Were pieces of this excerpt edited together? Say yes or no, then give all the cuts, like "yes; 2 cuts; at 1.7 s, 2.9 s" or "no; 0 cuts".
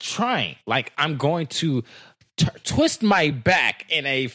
no; 0 cuts